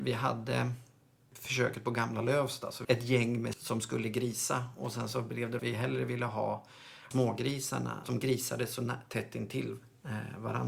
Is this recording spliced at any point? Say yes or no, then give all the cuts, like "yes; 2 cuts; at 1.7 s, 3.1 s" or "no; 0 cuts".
yes; 5 cuts; at 2.8 s, 3.5 s, 5.6 s, 7.1 s, 8.0 s